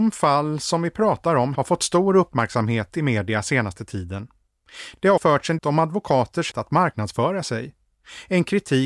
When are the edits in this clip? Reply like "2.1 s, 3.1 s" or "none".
1.5 s, 5.2 s, 5.6 s, 6.5 s